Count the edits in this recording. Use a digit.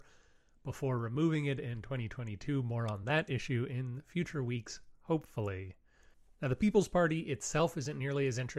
1